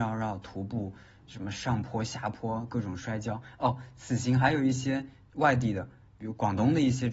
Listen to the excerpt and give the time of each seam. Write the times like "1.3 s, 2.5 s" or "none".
none